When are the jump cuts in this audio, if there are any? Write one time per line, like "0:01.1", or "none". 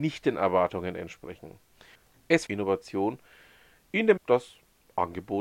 0:02.5
0:04.2